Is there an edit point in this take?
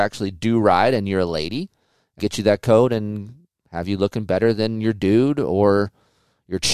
yes; 1 cut; at 2.2 s

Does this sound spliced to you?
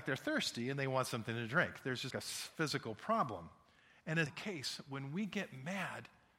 yes; 2 cuts; at 2.1 s, 4.3 s

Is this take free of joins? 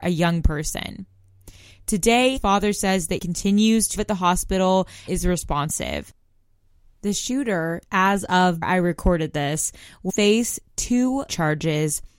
no; 8 cuts; at 2.4 s, 3.2 s, 4.0 s, 5.1 s, 7.8 s, 8.6 s, 10.1 s, 11.3 s

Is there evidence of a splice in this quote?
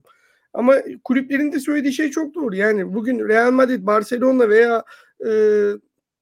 no; 0 cuts

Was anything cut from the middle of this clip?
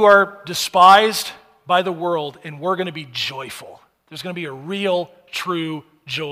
no; 0 cuts

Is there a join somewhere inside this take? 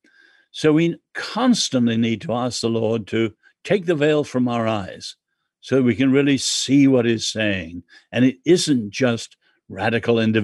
no; 0 cuts

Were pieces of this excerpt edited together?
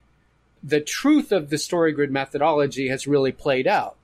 no; 0 cuts

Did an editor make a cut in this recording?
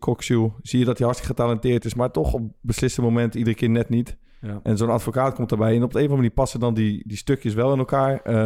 no; 0 cuts

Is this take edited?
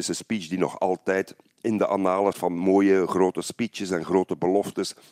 yes; 1 cut; at 2.3 s

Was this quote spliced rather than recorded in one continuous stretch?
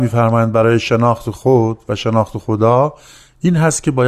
no; 0 cuts

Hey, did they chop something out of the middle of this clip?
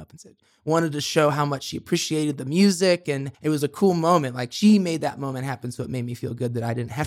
yes; 1 cut; at 3.3 s

